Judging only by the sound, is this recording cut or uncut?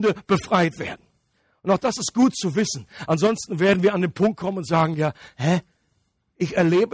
uncut